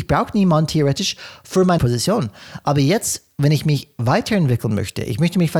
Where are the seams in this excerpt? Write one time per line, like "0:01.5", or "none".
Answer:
0:01.8